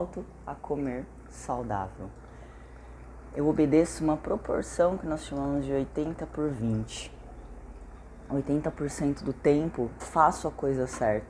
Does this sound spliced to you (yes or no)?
yes